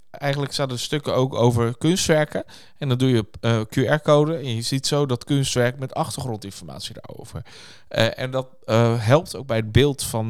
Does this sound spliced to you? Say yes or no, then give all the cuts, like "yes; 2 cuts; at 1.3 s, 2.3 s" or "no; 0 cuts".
no; 0 cuts